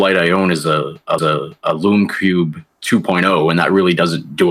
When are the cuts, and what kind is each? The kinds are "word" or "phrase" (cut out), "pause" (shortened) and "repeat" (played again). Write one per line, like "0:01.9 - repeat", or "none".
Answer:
0:01.2 - repeat